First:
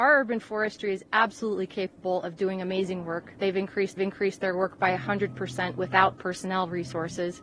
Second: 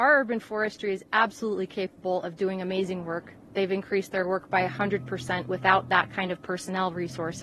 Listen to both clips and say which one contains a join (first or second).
first